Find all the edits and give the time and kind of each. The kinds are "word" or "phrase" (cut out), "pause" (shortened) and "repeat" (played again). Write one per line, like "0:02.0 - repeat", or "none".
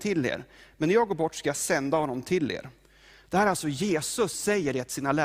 0:04.3 - word